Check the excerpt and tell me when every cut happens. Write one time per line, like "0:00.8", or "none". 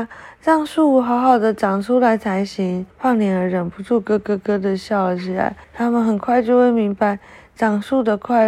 0:02.9
0:05.6